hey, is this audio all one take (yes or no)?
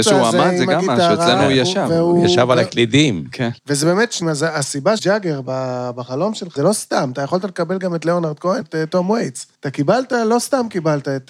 no